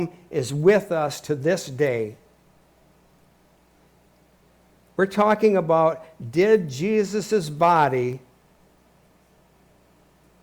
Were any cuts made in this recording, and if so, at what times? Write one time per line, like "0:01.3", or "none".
none

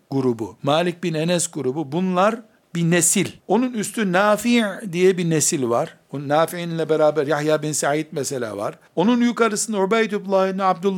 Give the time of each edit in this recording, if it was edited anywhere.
0:03.4
0:06.0
0:08.9

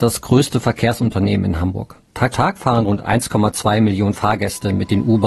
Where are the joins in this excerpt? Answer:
0:02.3

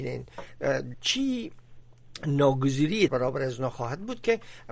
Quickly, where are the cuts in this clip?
0:00.9
0:03.1

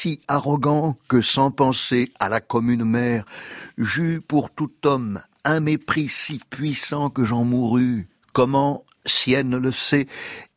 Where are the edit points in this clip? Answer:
none

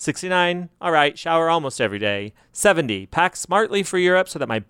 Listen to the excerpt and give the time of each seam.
none

